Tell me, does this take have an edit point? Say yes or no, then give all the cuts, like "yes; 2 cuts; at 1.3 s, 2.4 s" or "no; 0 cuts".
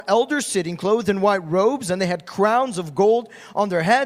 no; 0 cuts